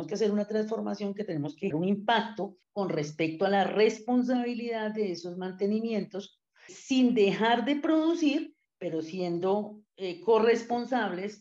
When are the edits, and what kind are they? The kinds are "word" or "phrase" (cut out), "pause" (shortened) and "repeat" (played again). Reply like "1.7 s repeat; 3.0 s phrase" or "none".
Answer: 1.7 s word; 2.6 s pause; 6.7 s word; 9.9 s pause